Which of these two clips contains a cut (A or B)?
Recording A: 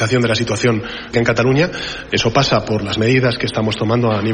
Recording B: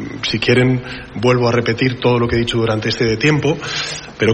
A